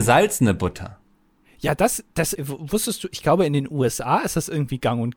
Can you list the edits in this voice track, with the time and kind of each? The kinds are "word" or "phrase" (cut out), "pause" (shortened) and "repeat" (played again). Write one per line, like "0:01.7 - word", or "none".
0:02.4 - word